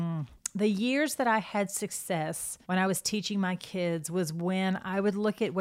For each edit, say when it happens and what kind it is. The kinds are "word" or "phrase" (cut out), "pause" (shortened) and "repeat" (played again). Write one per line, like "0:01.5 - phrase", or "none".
0:02.6 - pause